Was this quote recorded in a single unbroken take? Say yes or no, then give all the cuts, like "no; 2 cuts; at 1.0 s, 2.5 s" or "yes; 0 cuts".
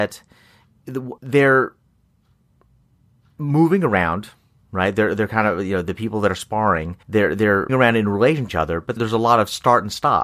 no; 5 cuts; at 1.2 s, 7.0 s, 7.7 s, 8.5 s, 9.0 s